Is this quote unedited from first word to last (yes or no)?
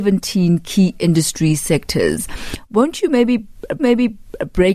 no